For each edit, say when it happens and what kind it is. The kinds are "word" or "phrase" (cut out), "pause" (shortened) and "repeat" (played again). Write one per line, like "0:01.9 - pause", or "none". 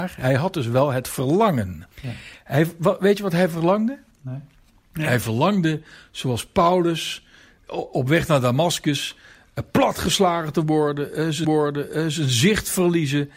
0:01.9 - pause
0:07.7 - word
0:11.4 - repeat